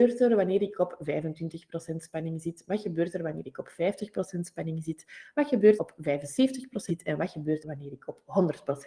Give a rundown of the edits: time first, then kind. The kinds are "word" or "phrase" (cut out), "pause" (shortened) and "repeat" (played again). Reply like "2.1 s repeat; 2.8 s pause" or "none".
5.8 s phrase; 6.9 s word; 7.6 s word